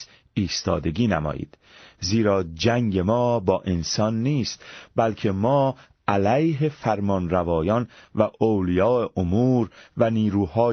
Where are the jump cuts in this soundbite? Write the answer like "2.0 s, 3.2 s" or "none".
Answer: none